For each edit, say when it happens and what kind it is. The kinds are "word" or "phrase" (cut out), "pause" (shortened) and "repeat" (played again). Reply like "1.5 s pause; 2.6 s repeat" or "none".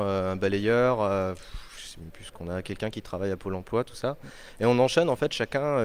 none